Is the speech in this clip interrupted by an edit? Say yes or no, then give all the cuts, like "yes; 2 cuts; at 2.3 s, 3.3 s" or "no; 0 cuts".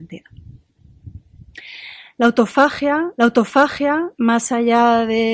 yes; 1 cut; at 3.2 s